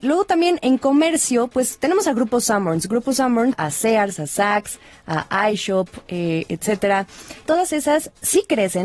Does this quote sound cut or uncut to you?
cut